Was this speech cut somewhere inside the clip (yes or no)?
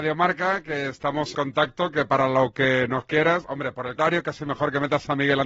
yes